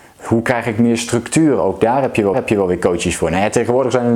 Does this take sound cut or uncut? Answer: cut